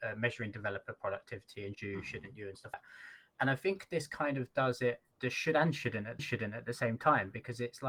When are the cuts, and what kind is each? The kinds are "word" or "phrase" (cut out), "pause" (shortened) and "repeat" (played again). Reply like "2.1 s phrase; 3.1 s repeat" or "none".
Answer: 1.7 s word; 2.7 s word; 5.1 s pause; 6.2 s repeat